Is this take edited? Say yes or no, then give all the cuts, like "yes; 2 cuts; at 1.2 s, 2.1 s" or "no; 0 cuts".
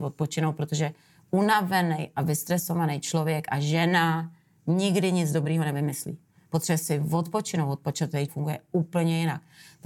yes; 1 cut; at 8.3 s